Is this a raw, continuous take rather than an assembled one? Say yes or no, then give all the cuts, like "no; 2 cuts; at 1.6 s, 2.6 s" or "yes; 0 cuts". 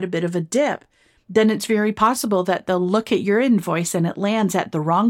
yes; 0 cuts